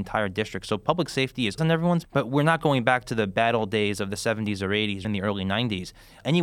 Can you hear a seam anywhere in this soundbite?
yes; 3 cuts; at 1.6 s, 2.0 s, 5.0 s

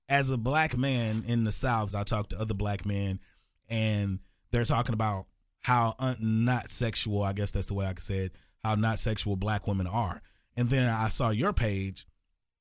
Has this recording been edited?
yes; 1 cut; at 1.9 s

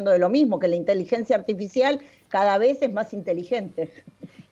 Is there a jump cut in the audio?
no; 0 cuts

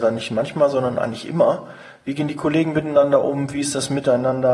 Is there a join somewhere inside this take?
no; 0 cuts

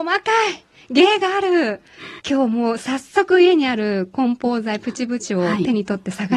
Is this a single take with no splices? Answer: no; 1 cut; at 2.2 s

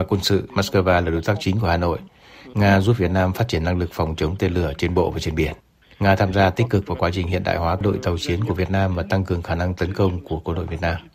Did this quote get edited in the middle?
no; 0 cuts

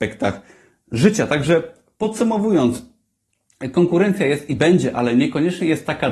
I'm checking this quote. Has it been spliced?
no; 0 cuts

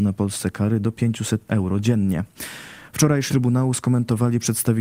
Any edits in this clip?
yes; 2 cuts; at 1.5 s, 3.3 s

